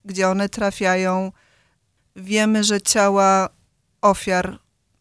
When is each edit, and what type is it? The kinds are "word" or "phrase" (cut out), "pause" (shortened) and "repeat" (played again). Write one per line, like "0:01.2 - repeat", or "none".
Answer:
none